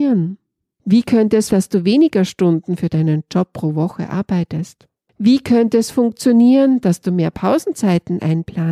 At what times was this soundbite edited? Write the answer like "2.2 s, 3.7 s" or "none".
1.5 s, 5.1 s